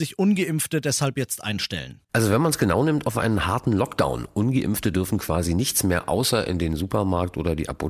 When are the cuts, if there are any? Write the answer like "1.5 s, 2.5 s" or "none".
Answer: none